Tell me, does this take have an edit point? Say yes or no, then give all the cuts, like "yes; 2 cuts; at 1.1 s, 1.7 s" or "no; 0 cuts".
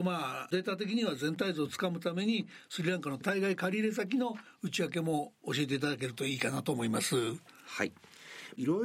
no; 0 cuts